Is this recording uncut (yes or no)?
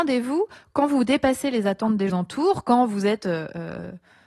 no